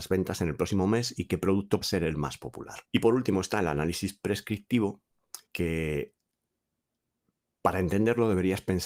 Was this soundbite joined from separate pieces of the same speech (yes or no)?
yes